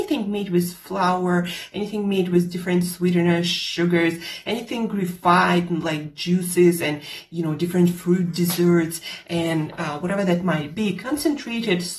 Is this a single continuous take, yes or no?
yes